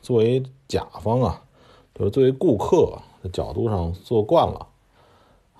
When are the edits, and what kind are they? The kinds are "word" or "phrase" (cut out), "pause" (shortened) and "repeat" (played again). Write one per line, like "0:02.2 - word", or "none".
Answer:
none

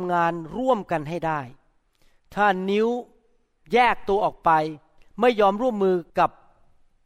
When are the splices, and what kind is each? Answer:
0:06.1 - pause

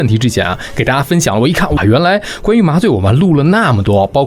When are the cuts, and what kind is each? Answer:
0:01.8 - word

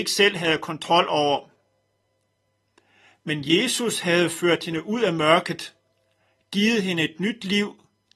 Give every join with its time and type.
none

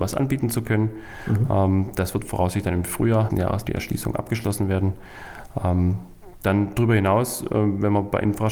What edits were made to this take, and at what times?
0:03.3 - word
0:03.6 - word

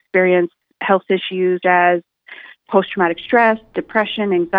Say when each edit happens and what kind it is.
0:01.6 - word
0:02.7 - word

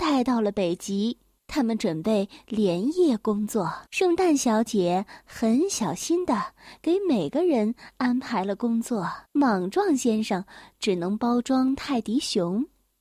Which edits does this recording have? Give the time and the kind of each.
0:01.4 - pause
0:03.9 - pause
0:09.2 - pause

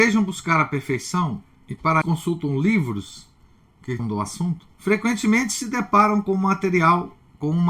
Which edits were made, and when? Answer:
0:02.0 - word
0:04.0 - word
0:04.7 - pause

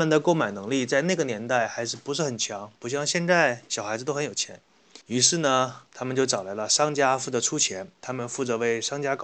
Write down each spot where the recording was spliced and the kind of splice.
0:05.0 - pause
0:05.9 - pause

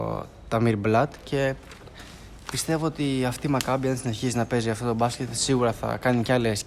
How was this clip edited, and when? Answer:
none

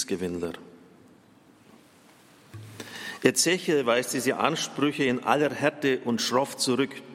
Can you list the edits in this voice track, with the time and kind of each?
none

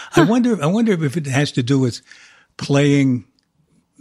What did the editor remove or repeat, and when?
none

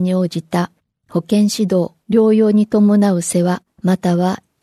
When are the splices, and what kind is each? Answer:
0:02.0 - pause
0:03.7 - pause

